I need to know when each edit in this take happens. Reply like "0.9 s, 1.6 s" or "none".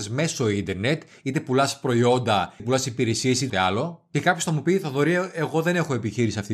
2.6 s, 3.5 s